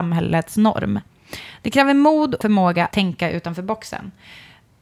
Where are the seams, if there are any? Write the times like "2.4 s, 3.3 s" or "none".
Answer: 2.4 s, 2.9 s